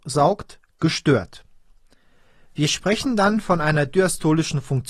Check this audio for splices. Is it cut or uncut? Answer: uncut